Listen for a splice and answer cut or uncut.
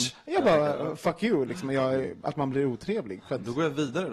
uncut